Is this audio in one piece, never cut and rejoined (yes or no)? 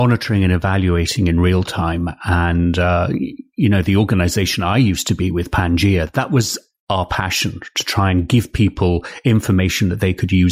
yes